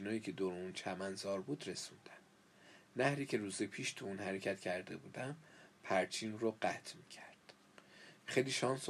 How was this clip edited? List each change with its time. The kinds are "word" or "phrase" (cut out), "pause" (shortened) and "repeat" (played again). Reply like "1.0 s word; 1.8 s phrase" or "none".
none